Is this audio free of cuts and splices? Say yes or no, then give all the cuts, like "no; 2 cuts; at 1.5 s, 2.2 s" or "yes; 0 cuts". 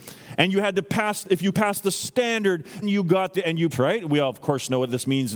no; 4 cuts; at 1.5 s, 2.8 s, 3.3 s, 3.7 s